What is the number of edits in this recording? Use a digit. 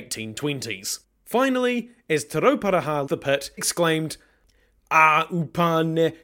3